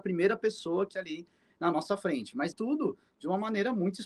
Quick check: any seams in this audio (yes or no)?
yes